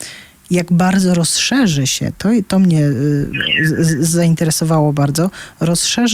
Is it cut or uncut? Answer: uncut